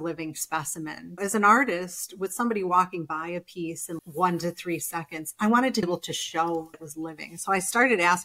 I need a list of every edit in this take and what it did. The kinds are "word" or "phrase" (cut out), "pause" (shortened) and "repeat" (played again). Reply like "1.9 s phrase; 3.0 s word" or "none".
1.2 s word; 4.0 s word; 5.8 s word; 6.7 s word